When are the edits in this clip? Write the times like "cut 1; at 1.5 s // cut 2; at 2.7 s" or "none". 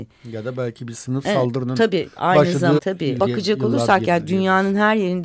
cut 1; at 1.2 s // cut 2; at 2.8 s // cut 3; at 3.2 s